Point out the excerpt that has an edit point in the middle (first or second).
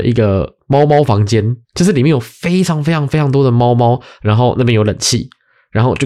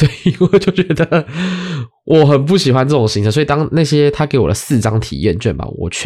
first